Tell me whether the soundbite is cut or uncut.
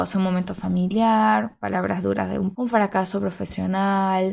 cut